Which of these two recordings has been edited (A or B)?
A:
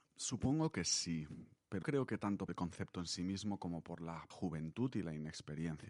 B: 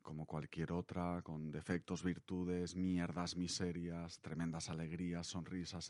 A